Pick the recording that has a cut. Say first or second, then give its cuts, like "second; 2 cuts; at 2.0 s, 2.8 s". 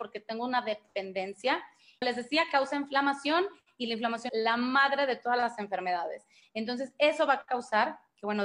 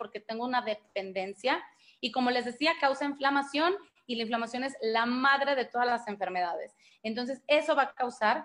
first; 2 cuts; at 2.0 s, 4.3 s